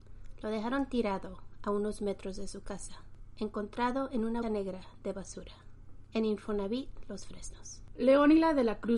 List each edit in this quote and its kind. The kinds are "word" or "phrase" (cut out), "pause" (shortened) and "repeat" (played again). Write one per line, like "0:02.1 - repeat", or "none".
0:04.4 - word